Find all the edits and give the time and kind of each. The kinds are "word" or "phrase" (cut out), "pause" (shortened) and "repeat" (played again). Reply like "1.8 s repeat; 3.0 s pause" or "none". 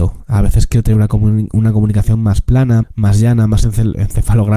2.8 s word